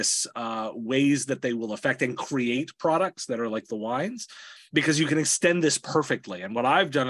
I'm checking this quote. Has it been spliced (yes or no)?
no